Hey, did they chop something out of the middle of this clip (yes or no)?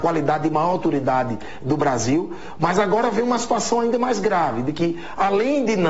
no